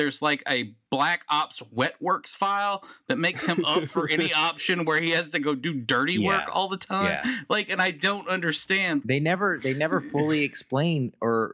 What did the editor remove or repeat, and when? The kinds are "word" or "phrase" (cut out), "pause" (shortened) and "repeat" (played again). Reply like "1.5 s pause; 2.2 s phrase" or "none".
9.0 s word